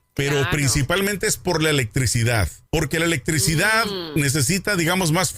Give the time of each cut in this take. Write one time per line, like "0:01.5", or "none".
0:02.7